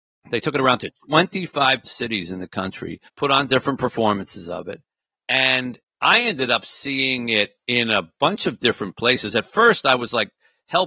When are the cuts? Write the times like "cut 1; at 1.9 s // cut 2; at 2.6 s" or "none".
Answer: cut 1; at 1.8 s // cut 2; at 3.1 s // cut 3; at 5.8 s // cut 4; at 7.6 s

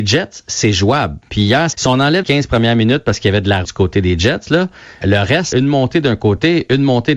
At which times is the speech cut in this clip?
cut 1; at 1.7 s // cut 2; at 2.2 s // cut 3; at 3.6 s // cut 4; at 5.0 s // cut 5; at 5.5 s

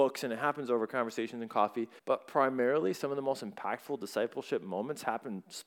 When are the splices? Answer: cut 1; at 2.0 s

